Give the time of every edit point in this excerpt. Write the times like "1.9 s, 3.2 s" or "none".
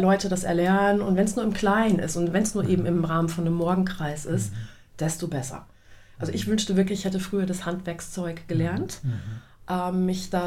none